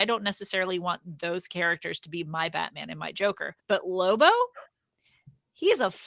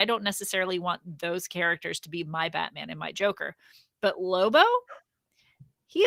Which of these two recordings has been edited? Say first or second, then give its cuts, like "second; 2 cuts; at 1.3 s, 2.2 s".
first; 1 cut; at 3.6 s